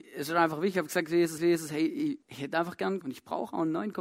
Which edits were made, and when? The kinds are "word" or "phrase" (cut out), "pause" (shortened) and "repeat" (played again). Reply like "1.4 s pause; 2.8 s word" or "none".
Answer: 1.4 s repeat; 2.2 s pause; 3.0 s word